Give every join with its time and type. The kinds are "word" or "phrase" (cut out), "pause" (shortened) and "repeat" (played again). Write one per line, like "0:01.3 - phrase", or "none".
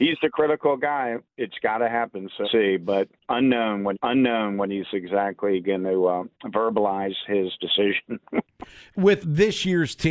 0:02.4 - word
0:03.9 - repeat
0:06.3 - pause
0:09.2 - word

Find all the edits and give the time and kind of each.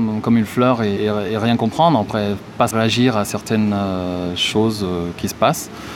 0:01.0 - word
0:02.7 - word

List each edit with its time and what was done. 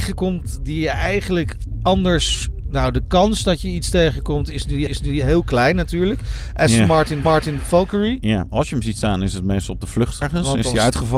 0:04.9 - repeat
0:07.2 - repeat
0:10.2 - phrase

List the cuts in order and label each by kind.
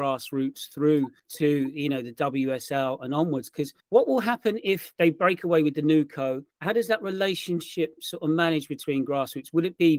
0:01.2 - pause
0:03.8 - pause
0:06.5 - pause

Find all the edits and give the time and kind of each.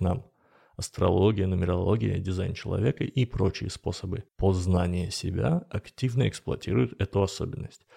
0:04.3 - pause

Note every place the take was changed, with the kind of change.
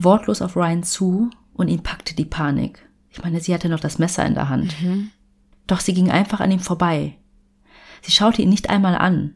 none

